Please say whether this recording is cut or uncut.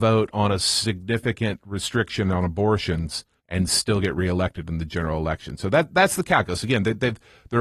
uncut